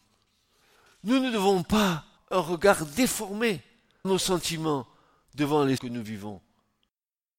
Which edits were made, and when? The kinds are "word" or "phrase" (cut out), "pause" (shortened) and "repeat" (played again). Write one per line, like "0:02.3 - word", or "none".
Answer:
0:02.2 - word
0:04.0 - word
0:05.8 - word